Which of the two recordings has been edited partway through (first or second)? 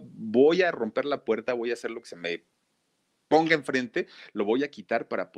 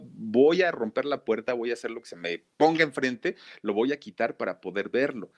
second